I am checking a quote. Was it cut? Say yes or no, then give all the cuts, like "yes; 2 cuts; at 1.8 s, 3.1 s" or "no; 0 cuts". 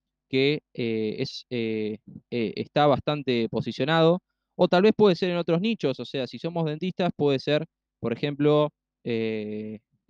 no; 0 cuts